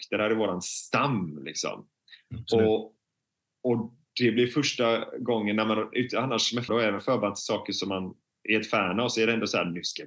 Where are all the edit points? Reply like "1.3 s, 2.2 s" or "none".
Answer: 6.7 s